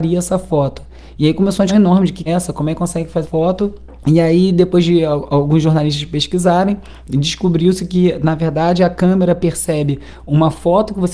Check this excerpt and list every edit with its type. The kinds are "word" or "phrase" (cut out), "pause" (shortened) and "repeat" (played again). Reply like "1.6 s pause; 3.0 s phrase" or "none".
1.7 s word; 2.3 s phrase; 3.2 s word; 4.0 s pause